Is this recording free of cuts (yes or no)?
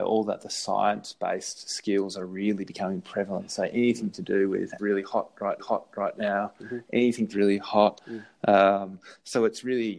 no